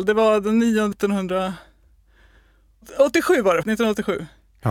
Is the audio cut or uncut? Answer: cut